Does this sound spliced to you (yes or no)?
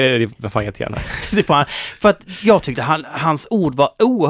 no